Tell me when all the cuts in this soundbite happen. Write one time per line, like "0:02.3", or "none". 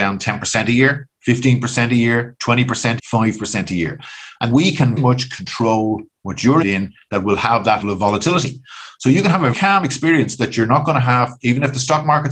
0:03.0
0:04.5
0:05.0
0:06.6
0:07.8
0:09.5